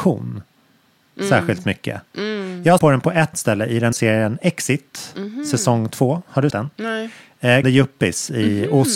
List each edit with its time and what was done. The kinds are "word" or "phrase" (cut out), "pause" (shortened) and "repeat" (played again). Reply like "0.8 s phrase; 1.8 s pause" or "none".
2.8 s word; 3.3 s word; 3.9 s word; 6.5 s word; 7.6 s word